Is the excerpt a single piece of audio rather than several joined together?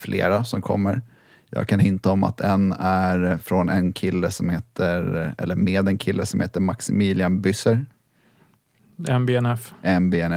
yes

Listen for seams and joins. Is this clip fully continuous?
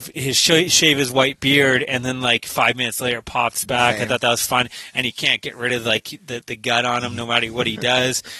yes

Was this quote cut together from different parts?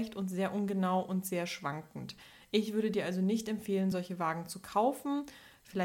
no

